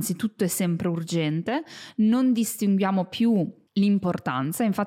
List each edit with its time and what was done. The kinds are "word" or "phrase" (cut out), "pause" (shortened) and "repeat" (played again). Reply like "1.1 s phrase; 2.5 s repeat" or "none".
3.7 s pause